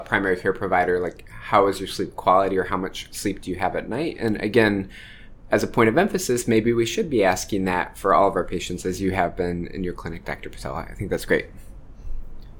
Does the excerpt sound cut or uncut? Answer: uncut